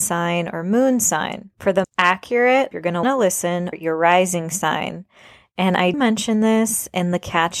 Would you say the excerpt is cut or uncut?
cut